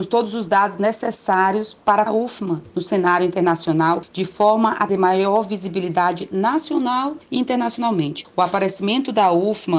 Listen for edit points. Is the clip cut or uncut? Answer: cut